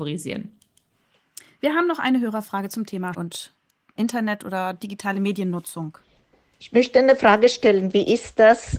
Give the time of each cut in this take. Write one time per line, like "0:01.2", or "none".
0:03.1
0:04.0